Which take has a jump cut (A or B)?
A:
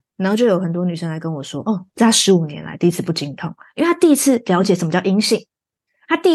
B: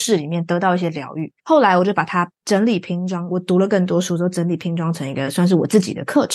B